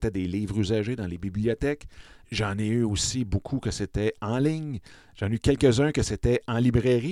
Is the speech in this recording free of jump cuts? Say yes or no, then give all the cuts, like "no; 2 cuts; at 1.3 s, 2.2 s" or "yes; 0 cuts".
yes; 0 cuts